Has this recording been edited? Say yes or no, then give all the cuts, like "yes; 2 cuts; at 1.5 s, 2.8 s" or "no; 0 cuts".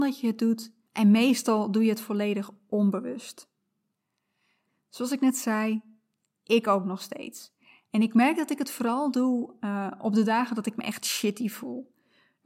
no; 0 cuts